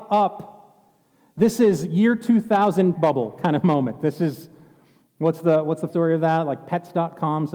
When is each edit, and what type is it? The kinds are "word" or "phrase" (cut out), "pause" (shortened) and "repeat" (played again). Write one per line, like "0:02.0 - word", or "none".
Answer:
0:02.9 - word
0:05.9 - word